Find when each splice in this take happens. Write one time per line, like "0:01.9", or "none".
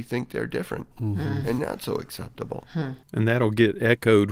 0:00.9
0:01.6
0:03.0